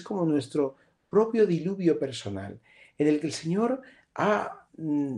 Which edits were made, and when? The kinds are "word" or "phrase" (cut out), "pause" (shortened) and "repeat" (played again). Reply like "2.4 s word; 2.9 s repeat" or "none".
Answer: none